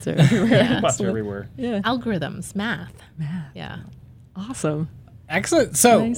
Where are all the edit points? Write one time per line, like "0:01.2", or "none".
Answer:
none